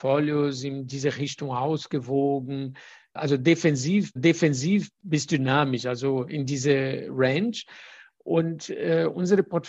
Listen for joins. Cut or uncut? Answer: cut